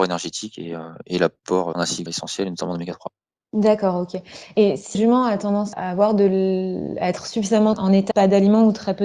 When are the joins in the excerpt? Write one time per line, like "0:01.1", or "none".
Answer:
0:01.7
0:02.1
0:04.9
0:05.7
0:07.7
0:08.1